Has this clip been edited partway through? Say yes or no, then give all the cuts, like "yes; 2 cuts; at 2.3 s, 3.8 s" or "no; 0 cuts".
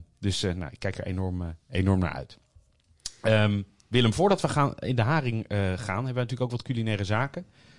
no; 0 cuts